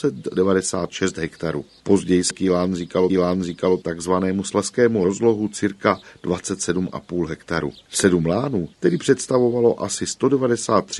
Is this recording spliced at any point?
yes; 4 cuts; at 2.3 s, 3.1 s, 5.0 s, 8.7 s

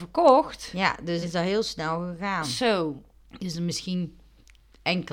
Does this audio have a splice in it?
yes; 1 cut; at 1.2 s

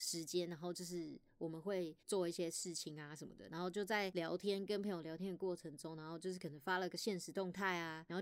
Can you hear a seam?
yes; 1 cut; at 2.0 s

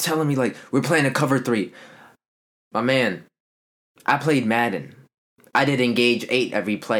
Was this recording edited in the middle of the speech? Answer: no; 0 cuts

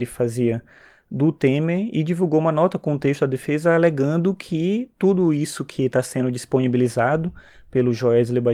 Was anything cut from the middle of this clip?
no; 0 cuts

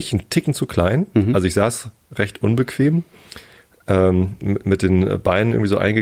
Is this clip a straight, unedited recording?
yes; 0 cuts

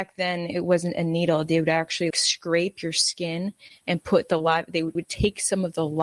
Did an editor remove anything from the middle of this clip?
yes; 2 cuts; at 2.1 s, 5.0 s

